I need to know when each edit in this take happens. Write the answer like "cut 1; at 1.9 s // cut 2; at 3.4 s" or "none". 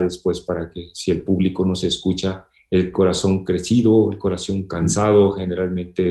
none

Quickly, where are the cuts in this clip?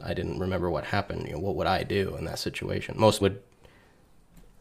cut 1; at 3.2 s

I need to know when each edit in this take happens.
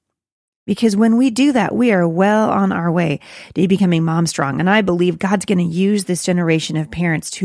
none

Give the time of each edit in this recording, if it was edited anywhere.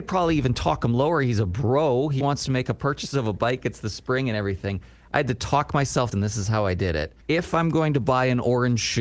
cut 1; at 2.2 s // cut 2; at 6.1 s // cut 3; at 7.2 s

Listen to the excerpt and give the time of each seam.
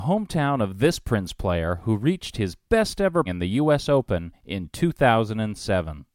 cut 1; at 3.2 s

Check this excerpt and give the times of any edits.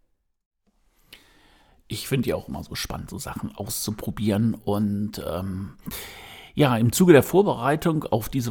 none

